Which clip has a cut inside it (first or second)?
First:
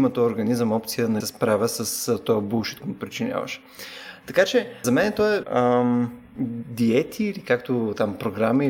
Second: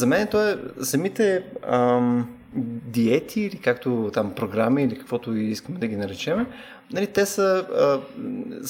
first